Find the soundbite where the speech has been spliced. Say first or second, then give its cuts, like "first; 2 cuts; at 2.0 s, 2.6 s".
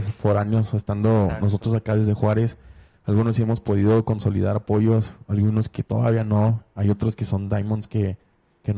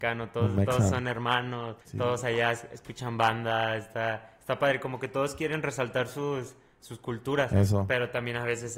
second; 1 cut; at 1.8 s